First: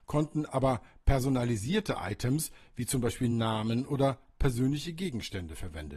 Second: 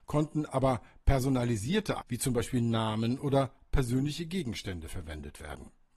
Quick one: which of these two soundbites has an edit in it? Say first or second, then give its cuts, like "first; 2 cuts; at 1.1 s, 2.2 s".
second; 1 cut; at 2.0 s